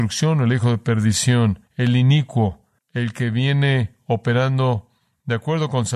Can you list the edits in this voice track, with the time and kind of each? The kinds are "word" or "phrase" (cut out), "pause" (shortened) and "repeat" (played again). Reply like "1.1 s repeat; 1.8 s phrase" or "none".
1.7 s pause; 2.8 s pause